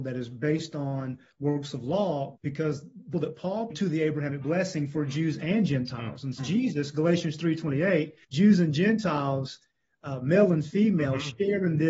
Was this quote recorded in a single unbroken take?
no; 5 cuts; at 2.3 s, 3.1 s, 3.7 s, 6.4 s, 8.2 s

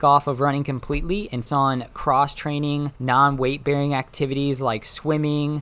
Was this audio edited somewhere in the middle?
yes; 2 cuts; at 1.5 s, 3.0 s

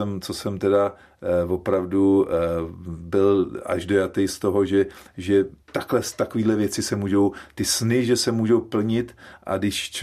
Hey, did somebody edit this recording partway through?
yes; 1 cut; at 5.6 s

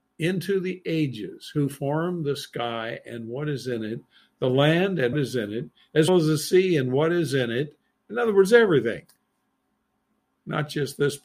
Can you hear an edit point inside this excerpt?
yes; 2 cuts; at 5.1 s, 6.1 s

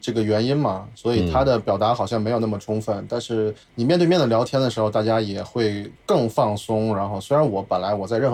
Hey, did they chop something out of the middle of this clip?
yes; 2 cuts; at 3.6 s, 6.0 s

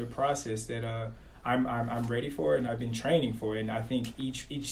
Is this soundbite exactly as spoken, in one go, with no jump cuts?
no; 1 cut; at 2.7 s

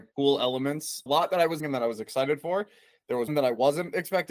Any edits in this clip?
yes; 3 cuts; at 1.1 s, 1.6 s, 3.3 s

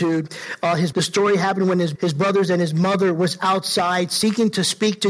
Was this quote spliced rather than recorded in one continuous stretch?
yes; 2 cuts; at 0.9 s, 1.9 s

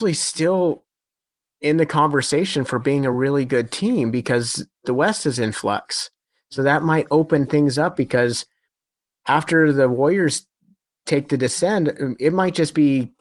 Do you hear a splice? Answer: no; 0 cuts

